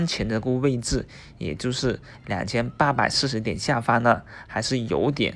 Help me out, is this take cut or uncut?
uncut